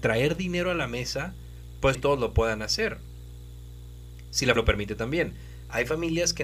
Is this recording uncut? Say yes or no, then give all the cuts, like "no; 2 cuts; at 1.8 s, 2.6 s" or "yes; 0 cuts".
no; 2 cuts; at 1.9 s, 4.6 s